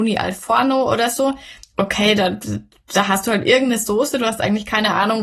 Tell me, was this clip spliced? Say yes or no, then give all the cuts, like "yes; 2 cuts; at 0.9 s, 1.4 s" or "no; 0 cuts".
yes; 1 cut; at 1.6 s